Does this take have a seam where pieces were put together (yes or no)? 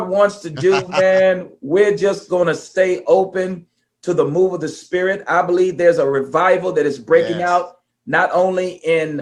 no